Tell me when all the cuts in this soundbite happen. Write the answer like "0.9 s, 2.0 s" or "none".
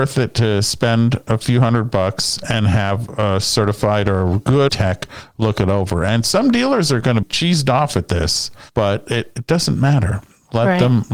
4.7 s, 7.2 s, 8.7 s